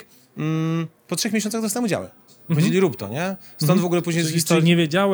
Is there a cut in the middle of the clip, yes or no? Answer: no